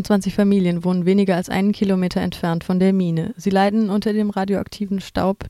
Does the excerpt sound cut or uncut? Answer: uncut